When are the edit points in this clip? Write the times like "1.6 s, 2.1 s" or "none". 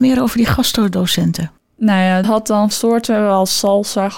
1.6 s, 2.2 s, 2.7 s